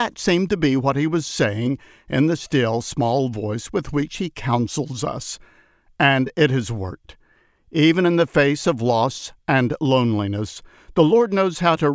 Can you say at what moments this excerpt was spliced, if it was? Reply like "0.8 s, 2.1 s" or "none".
none